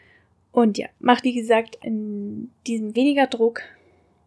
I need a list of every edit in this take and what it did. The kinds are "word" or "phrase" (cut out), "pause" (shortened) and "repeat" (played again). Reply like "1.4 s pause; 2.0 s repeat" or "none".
1.2 s word; 1.8 s word; 2.9 s word